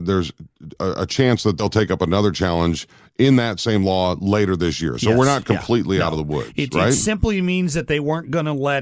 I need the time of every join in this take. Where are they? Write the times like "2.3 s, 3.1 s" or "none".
none

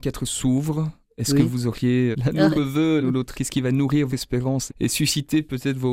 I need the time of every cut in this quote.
2.1 s, 2.5 s, 3.0 s, 3.3 s, 4.1 s, 4.7 s

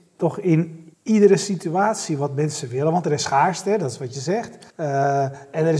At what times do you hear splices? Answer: 0.9 s, 4.7 s

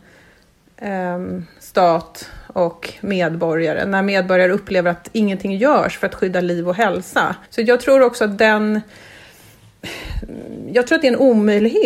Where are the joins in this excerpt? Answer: 7.5 s

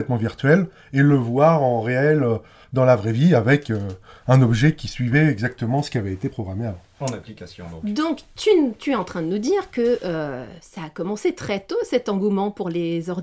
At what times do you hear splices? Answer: none

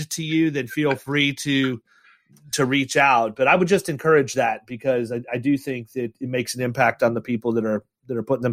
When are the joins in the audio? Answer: none

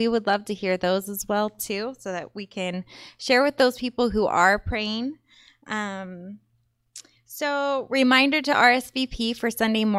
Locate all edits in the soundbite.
none

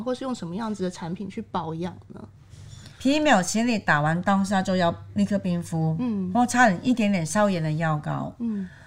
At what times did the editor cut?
2.9 s

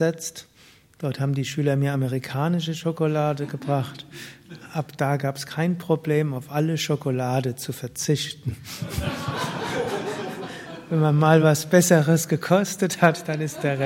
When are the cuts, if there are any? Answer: none

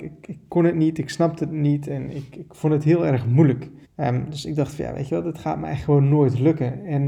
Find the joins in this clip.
3.8 s

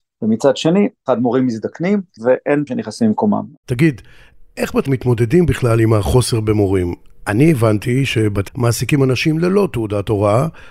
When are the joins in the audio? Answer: 2.2 s, 2.7 s, 4.9 s, 8.5 s

